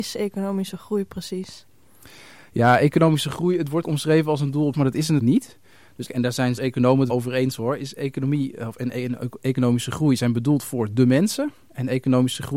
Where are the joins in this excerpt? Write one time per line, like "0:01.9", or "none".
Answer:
0:03.8
0:04.7
0:05.2
0:06.1
0:06.6
0:07.1